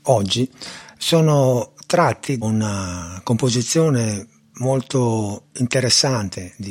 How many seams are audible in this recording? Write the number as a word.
two